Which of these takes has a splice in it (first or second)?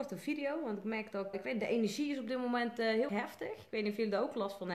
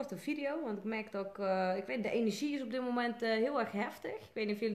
first